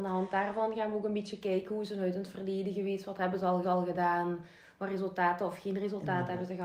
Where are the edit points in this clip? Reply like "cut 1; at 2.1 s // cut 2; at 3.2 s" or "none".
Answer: cut 1; at 3.6 s